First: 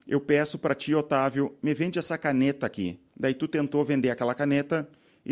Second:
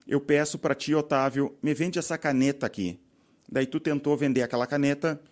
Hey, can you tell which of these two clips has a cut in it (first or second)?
first